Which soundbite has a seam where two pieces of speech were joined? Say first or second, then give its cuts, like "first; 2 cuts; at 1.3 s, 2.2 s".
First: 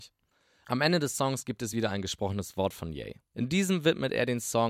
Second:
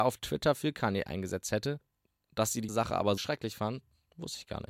second; 2 cuts; at 2.7 s, 3.2 s